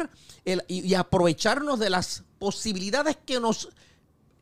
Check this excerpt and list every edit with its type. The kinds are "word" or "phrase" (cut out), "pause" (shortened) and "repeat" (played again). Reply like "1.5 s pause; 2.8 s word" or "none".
none